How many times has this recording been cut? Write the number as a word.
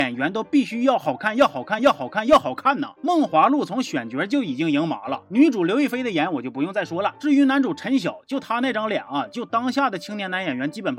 one